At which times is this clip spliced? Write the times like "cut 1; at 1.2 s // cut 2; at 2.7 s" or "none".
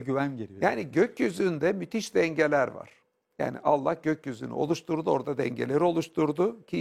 none